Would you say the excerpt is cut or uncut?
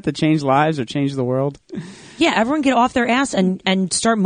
uncut